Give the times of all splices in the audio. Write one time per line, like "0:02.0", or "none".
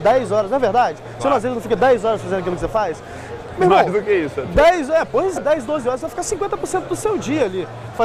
0:05.4